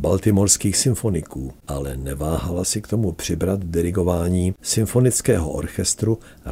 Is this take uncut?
no; 2 cuts; at 1.6 s, 4.6 s

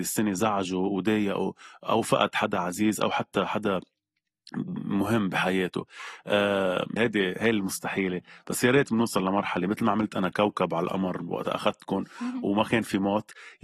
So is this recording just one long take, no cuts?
no; 1 cut; at 7.0 s

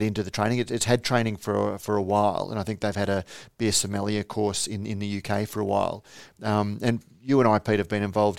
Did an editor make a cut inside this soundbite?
no; 0 cuts

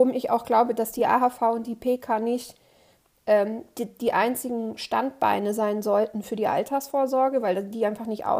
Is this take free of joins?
yes; 0 cuts

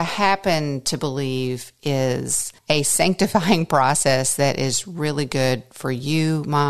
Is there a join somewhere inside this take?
yes; 1 cut; at 2.6 s

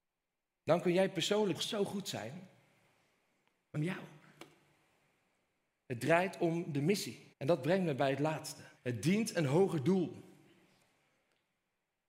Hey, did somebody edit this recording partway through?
yes; 4 cuts; at 1.5 s, 3.7 s, 7.3 s, 8.8 s

